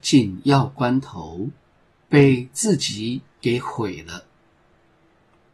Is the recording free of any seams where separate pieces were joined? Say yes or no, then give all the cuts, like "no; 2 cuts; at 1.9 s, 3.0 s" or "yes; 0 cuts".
yes; 0 cuts